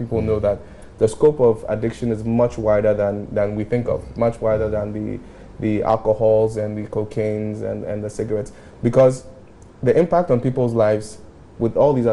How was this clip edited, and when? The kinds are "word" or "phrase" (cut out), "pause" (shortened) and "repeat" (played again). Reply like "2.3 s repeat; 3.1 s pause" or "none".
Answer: none